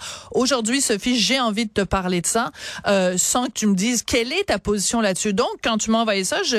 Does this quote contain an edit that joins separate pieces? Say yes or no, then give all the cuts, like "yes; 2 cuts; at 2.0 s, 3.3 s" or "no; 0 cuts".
no; 0 cuts